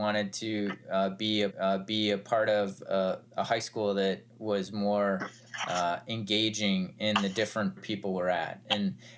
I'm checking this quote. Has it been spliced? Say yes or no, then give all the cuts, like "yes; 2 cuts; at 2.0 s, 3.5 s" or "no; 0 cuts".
yes; 2 cuts; at 1.5 s, 7.8 s